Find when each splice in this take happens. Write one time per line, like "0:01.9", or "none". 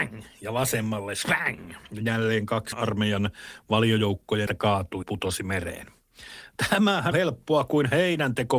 0:02.7
0:04.5
0:05.0
0:07.1